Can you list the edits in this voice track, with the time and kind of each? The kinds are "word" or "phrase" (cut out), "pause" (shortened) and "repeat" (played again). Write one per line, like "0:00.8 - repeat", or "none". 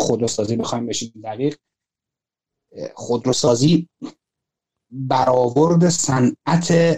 none